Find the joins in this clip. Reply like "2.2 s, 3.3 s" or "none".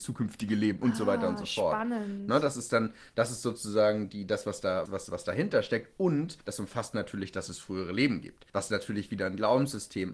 4.9 s, 6.4 s, 8.5 s